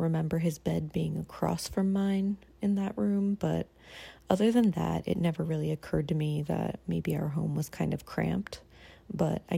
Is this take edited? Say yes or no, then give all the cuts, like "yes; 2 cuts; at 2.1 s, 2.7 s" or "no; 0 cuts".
no; 0 cuts